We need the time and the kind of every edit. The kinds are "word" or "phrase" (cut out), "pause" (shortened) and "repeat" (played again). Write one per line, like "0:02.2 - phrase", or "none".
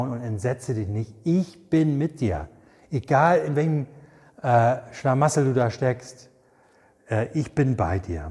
none